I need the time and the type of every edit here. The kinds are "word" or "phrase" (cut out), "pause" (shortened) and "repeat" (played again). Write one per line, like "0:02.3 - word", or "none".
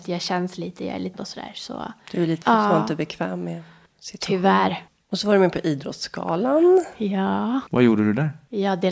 0:01.1 - word
0:02.4 - word